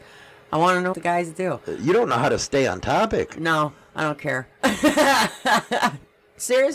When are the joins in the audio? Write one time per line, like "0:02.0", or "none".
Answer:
0:00.9